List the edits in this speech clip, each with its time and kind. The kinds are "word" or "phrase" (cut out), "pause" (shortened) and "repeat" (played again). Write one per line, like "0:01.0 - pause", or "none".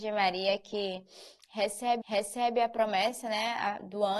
0:02.0 - repeat